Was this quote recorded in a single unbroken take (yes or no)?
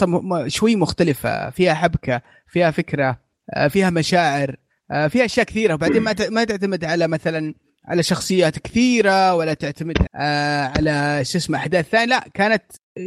no